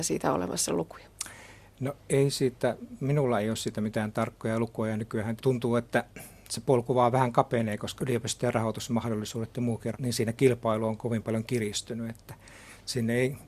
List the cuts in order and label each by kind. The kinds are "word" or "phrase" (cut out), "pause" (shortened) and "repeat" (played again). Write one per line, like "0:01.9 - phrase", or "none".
0:05.4 - word
0:08.0 - word
0:09.9 - word